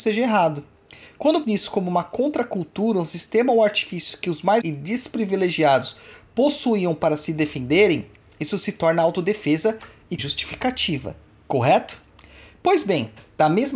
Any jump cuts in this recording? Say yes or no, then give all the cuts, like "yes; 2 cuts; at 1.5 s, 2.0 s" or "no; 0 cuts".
yes; 3 cuts; at 1.4 s, 4.6 s, 10.2 s